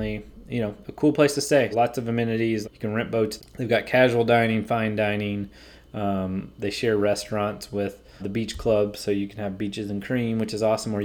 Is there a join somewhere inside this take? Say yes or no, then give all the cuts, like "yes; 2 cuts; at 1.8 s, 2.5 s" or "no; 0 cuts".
yes; 4 cuts; at 1.7 s, 2.6 s, 3.4 s, 8.2 s